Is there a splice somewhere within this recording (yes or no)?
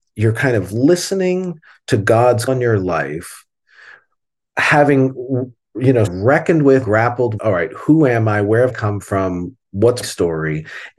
yes